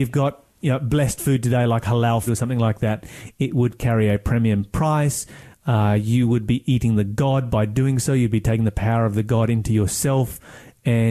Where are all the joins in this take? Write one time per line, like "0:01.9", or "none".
0:02.3